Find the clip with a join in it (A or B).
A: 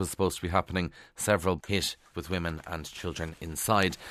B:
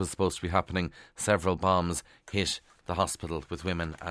A